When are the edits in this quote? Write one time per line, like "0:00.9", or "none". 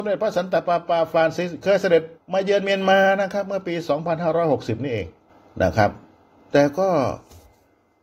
0:02.2
0:05.3
0:06.3